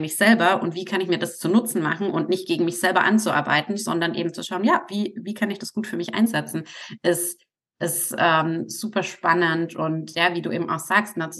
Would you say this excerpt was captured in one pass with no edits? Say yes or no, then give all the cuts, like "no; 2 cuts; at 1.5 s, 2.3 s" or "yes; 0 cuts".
yes; 0 cuts